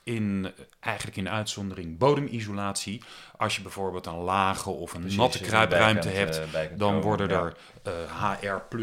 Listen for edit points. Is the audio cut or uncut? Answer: uncut